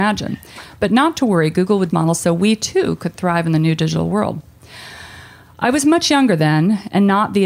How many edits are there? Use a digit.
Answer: 1